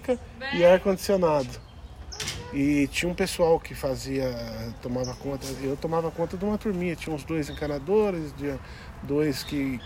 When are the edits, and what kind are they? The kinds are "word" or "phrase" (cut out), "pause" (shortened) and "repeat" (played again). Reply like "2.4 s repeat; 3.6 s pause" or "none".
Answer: none